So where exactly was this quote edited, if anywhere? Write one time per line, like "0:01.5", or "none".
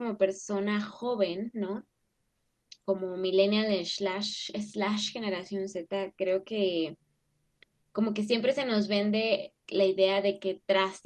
none